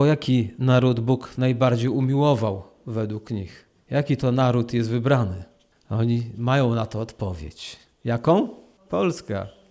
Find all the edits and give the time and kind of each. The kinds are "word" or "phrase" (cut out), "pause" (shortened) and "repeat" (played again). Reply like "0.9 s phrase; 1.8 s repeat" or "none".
none